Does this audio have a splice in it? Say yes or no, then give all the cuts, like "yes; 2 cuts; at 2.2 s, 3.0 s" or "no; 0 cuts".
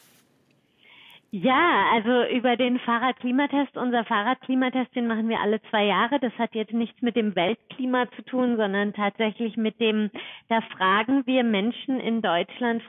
no; 0 cuts